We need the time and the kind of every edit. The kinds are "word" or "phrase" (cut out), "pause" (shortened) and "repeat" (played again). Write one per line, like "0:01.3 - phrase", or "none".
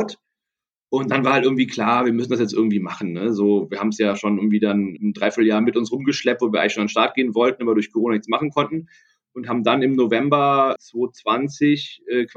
0:05.0 - word
0:10.8 - word